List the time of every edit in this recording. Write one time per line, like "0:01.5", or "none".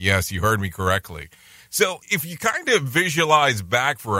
0:02.0